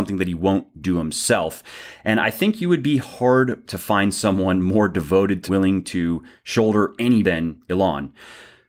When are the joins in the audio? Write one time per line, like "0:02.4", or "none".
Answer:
0:03.7
0:05.5
0:07.2